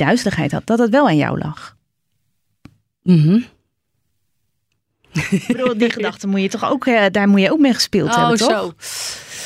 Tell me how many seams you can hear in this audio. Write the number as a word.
zero